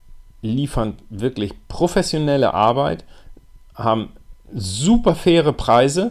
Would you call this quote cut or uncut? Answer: uncut